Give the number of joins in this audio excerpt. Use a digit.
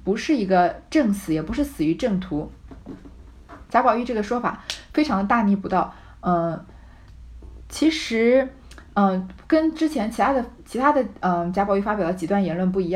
0